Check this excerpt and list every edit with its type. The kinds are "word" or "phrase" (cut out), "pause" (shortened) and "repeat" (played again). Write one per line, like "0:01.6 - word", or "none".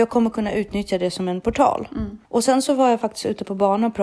0:02.2 - pause